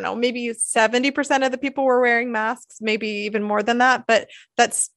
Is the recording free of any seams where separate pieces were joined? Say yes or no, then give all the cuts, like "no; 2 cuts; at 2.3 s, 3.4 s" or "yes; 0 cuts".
yes; 0 cuts